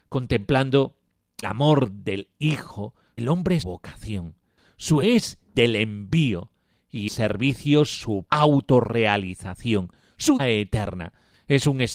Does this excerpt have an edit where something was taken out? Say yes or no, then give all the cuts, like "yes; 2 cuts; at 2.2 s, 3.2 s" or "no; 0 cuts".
yes; 8 cuts; at 1.4 s, 3.2 s, 3.6 s, 5.0 s, 5.5 s, 7.1 s, 8.3 s, 10.4 s